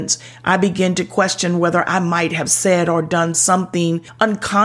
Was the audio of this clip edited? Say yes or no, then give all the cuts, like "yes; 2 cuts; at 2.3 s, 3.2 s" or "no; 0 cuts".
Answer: no; 0 cuts